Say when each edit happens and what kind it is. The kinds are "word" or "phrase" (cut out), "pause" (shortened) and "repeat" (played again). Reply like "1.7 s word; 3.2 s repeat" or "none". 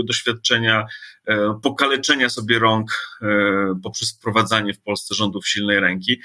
none